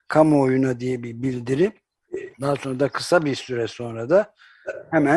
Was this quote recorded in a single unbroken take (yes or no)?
no